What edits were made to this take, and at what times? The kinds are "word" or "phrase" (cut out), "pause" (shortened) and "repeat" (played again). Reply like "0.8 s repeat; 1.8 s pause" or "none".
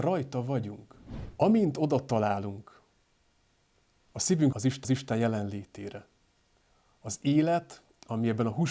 4.5 s word; 4.8 s repeat